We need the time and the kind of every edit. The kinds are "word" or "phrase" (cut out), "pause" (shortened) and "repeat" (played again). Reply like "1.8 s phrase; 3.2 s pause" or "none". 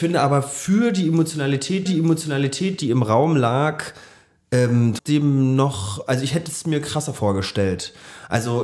1.9 s repeat; 5.0 s word